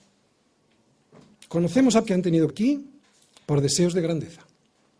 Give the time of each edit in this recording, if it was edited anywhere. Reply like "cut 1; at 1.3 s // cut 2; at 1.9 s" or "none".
cut 1; at 2.0 s // cut 2; at 2.5 s // cut 3; at 3.0 s